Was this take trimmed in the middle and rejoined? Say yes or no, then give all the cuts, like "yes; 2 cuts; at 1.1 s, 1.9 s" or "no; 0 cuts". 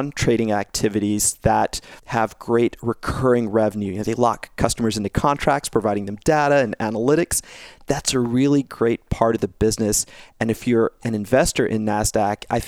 yes; 1 cut; at 2.0 s